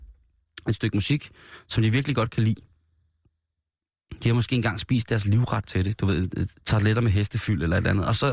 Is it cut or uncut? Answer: cut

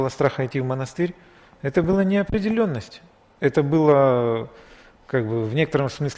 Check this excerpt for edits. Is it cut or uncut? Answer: uncut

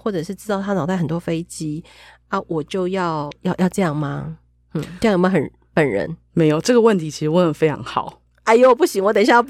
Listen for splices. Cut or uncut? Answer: uncut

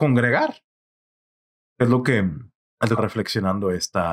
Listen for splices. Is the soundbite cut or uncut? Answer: cut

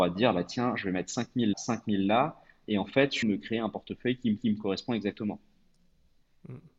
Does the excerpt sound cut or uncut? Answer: cut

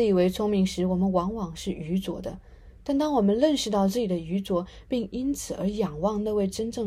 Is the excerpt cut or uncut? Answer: uncut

